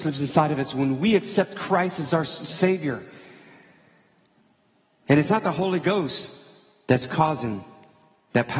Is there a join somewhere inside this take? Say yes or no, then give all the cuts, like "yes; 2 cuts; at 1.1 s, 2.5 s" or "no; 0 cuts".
no; 0 cuts